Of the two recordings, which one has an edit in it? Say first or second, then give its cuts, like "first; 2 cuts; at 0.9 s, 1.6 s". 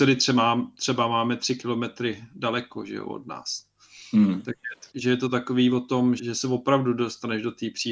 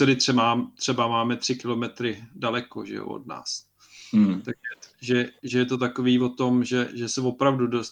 first; 2 cuts; at 4.9 s, 6.2 s